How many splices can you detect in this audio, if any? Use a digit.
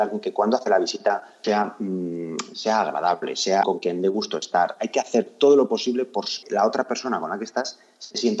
3